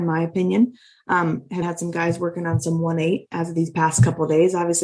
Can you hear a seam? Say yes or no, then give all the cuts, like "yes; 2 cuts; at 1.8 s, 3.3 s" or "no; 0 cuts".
yes; 1 cut; at 1.6 s